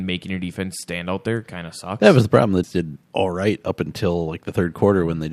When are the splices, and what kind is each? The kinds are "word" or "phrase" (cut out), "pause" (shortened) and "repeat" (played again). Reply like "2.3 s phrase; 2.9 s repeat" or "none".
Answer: 2.6 s word; 3.0 s pause